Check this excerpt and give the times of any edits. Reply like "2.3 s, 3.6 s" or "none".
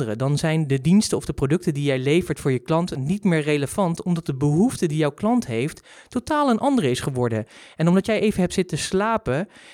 none